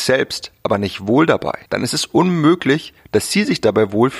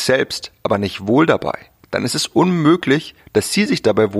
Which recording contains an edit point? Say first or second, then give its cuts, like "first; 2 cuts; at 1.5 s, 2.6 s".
first; 1 cut; at 1.7 s